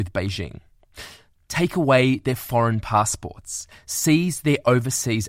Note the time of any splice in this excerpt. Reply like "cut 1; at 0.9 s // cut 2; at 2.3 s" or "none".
none